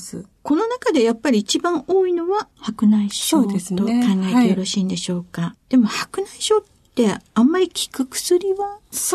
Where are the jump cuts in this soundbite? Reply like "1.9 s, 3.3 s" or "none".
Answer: none